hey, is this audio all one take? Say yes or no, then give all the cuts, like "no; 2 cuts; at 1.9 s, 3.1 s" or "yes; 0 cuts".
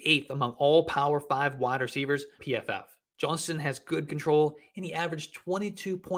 no; 2 cuts; at 2.4 s, 4.1 s